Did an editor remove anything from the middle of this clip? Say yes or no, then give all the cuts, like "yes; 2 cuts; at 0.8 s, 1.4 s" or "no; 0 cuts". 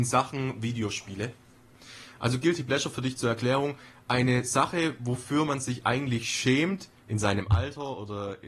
no; 0 cuts